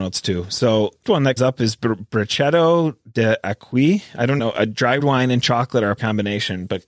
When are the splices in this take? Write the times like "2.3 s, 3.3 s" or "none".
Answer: 1.0 s, 1.4 s, 4.4 s, 5.0 s, 6.0 s

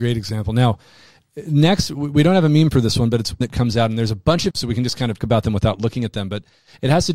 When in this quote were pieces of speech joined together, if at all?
3.4 s, 4.5 s, 5.2 s

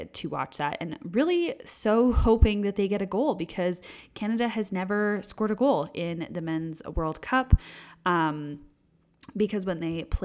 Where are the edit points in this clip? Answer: none

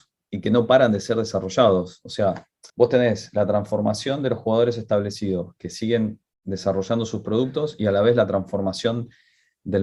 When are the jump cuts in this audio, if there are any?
2.7 s

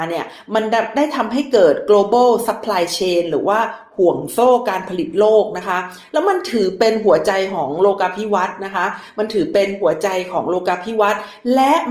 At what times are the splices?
none

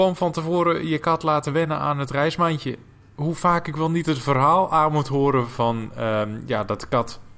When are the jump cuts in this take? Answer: none

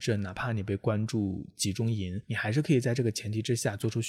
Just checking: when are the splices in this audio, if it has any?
2.2 s

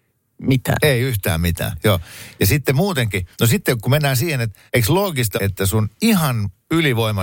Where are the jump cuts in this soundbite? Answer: 3.3 s, 4.7 s, 5.4 s

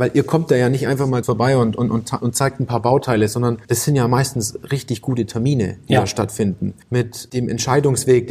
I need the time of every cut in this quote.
1.2 s, 2.2 s, 3.6 s, 6.8 s

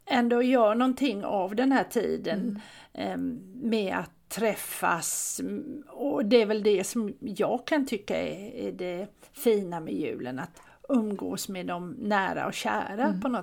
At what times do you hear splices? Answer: none

